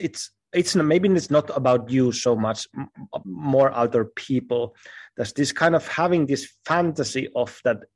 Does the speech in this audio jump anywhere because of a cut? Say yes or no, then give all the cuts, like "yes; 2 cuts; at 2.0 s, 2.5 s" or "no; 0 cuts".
yes; 1 cut; at 3.2 s